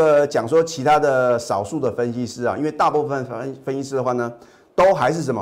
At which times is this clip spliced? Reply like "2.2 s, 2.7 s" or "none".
none